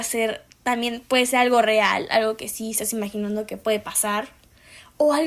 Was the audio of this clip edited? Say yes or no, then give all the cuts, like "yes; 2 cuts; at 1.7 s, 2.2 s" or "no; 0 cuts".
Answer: no; 0 cuts